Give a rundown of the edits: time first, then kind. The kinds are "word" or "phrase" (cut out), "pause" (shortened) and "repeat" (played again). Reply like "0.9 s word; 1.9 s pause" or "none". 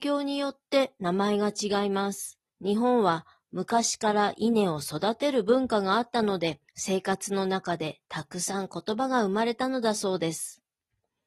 2.5 s pause; 6.7 s pause; 8.0 s pause